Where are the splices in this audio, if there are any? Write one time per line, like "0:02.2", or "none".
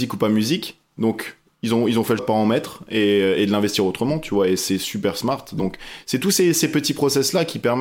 0:02.2